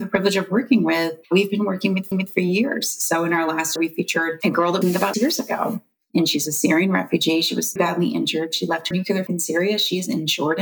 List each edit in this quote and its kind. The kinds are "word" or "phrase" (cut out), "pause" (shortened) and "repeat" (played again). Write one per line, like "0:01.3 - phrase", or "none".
0:01.2 - pause
0:02.1 - repeat
0:03.8 - phrase
0:04.8 - phrase
0:05.1 - word
0:07.8 - word
0:08.9 - word
0:09.3 - phrase